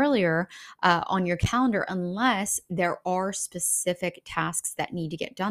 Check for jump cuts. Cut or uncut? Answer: uncut